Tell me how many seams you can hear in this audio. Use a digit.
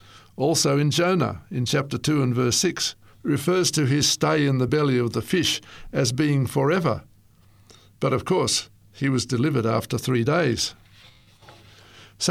0